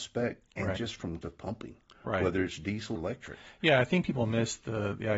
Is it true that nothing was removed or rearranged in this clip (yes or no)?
no